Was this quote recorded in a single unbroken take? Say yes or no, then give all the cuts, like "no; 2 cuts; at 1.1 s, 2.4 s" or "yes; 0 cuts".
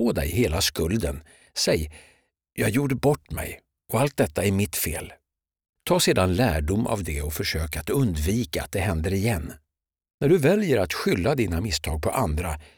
yes; 0 cuts